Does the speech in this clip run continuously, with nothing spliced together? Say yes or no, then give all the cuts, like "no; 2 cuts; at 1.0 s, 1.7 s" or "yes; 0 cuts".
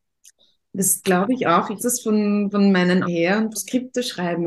no; 4 cuts; at 1.0 s, 1.8 s, 3.0 s, 3.5 s